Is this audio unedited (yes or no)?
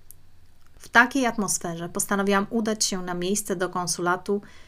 yes